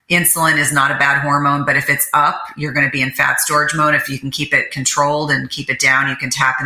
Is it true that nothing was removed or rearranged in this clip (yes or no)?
yes